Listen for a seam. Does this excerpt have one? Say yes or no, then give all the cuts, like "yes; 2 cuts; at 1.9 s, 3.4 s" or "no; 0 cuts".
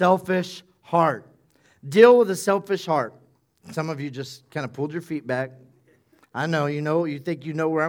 no; 0 cuts